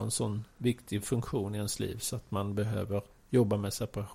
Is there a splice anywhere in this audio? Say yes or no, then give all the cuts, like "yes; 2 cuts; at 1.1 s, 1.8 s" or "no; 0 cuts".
no; 0 cuts